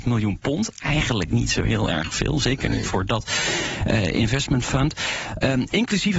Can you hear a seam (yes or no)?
no